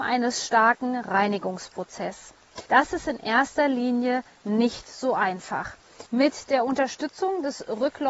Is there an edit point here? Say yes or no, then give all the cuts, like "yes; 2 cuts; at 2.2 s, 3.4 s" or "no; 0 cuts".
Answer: yes; 2 cuts; at 2.7 s, 6.1 s